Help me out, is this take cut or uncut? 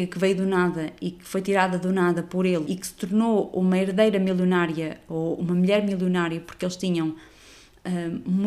cut